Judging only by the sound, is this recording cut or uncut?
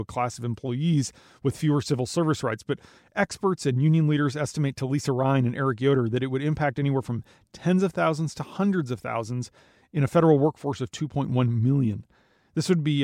uncut